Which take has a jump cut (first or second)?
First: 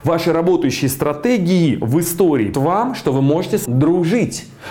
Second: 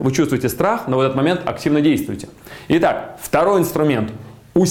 first